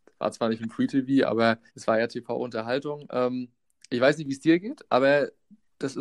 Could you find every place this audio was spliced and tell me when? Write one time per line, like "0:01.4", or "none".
0:01.7